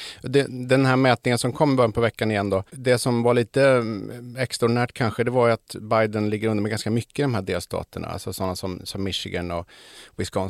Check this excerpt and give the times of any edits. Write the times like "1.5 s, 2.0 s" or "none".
2.7 s

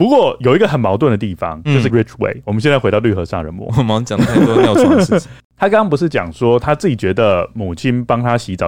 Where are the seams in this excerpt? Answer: 1.9 s, 3.7 s

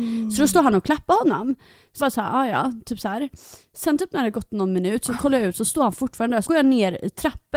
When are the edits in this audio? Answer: 2.0 s, 6.5 s

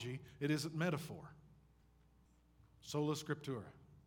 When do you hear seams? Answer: none

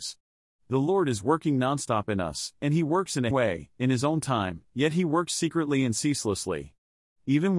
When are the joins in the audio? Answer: 3.3 s

